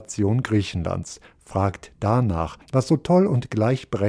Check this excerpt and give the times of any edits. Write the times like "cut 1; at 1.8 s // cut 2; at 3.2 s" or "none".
cut 1; at 2.6 s